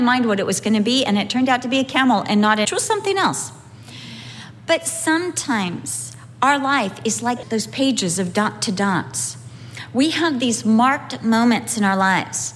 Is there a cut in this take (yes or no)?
yes